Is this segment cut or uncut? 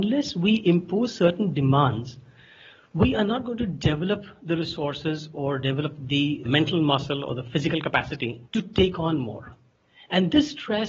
cut